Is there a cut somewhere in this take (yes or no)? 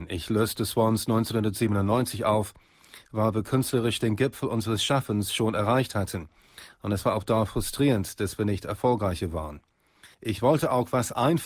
yes